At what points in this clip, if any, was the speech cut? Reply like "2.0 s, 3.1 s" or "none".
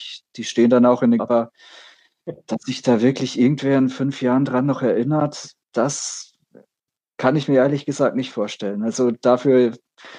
1.2 s, 5.6 s